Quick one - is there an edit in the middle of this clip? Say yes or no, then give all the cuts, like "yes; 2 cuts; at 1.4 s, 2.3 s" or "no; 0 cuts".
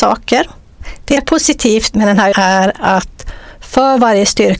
yes; 2 cuts; at 1.2 s, 2.3 s